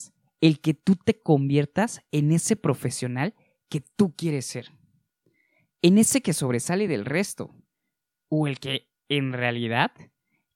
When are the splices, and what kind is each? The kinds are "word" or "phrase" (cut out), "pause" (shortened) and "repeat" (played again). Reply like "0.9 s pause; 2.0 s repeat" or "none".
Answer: none